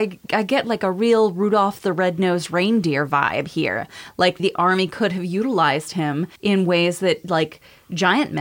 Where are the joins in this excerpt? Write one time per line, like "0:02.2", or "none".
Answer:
0:04.4
0:06.4